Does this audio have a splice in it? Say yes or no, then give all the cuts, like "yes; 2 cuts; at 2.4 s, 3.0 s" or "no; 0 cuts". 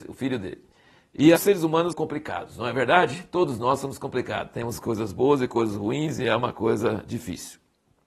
yes; 2 cuts; at 1.4 s, 1.9 s